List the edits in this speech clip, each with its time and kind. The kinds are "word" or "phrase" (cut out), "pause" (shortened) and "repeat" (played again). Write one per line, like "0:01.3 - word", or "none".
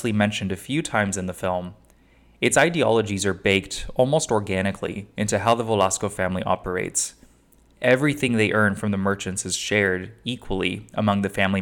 none